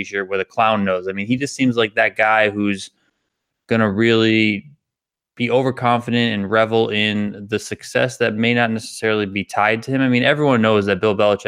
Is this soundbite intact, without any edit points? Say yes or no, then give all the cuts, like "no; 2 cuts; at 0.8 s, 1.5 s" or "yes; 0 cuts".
yes; 0 cuts